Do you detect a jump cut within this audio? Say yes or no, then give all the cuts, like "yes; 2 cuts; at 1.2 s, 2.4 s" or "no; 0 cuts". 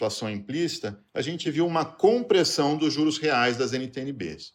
no; 0 cuts